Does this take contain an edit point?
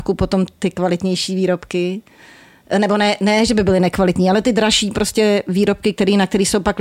no; 0 cuts

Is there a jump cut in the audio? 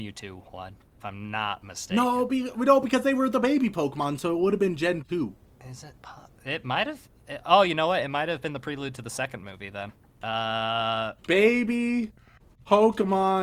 no; 0 cuts

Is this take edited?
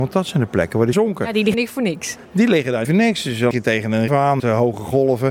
yes; 6 cuts; at 0.9 s, 1.5 s, 2.8 s, 3.5 s, 4.1 s, 4.4 s

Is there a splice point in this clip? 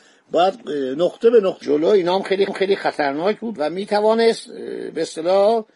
yes; 2 cuts; at 1.6 s, 2.5 s

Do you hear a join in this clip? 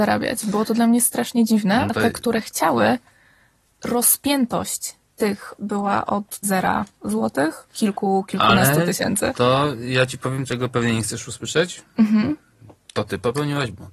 yes; 5 cuts; at 1.9 s, 5.6 s, 6.4 s, 7.7 s, 10.5 s

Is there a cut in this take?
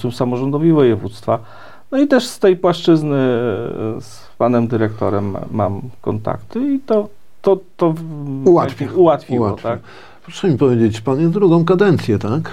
no; 0 cuts

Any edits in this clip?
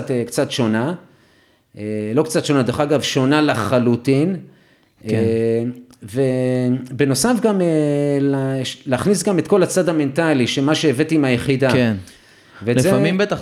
no; 0 cuts

